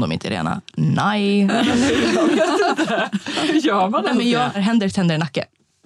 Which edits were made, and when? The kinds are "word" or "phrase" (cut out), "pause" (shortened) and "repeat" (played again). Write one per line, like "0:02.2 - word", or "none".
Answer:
0:04.5 - word